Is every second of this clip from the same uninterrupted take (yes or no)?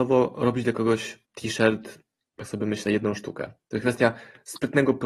no